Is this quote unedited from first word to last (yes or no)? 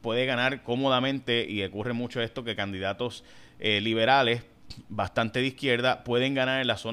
yes